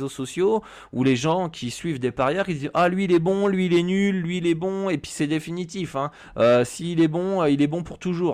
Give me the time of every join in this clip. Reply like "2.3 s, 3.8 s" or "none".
none